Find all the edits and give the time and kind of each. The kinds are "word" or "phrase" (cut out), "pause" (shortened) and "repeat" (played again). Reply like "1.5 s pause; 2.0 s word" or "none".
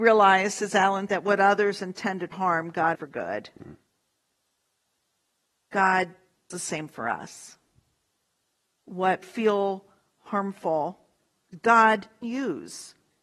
1.1 s word; 2.3 s word; 2.9 s word; 6.5 s word; 9.2 s word; 12.2 s word

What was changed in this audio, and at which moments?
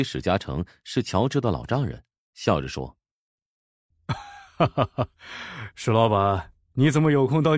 none

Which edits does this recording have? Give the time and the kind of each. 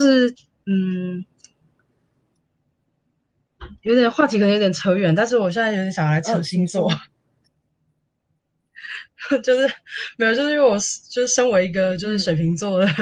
3.8 s pause

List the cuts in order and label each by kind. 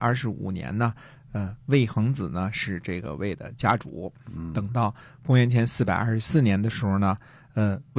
none

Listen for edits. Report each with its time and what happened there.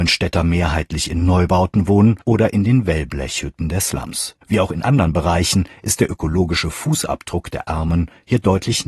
2.2 s pause; 4.4 s pause

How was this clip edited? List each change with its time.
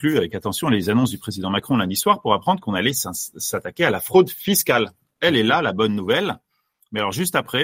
none

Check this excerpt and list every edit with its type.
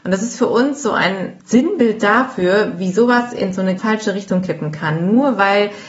1.4 s pause; 3.8 s word

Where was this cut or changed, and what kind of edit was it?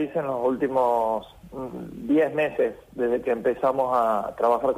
none

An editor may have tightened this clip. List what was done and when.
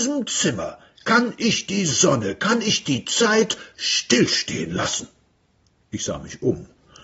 none

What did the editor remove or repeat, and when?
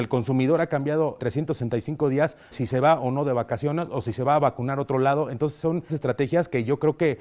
1.2 s word; 2.5 s word; 5.9 s word

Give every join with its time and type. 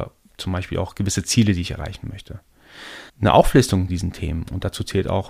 3.1 s pause; 3.9 s word

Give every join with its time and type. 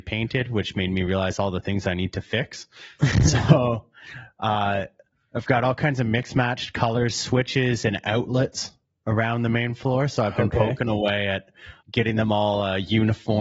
11.8 s pause

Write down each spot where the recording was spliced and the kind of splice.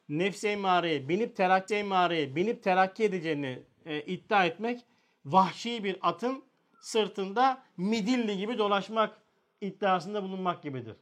1.7 s repeat

